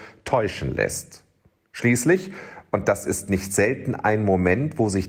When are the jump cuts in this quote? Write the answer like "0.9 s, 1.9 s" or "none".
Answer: none